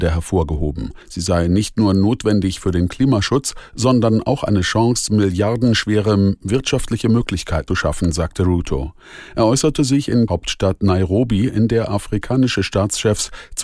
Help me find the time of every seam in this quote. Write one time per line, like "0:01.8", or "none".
0:01.0
0:07.7
0:10.3